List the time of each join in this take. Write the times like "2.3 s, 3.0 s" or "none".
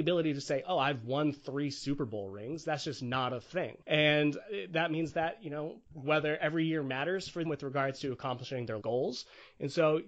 3.8 s, 5.9 s, 7.5 s, 8.8 s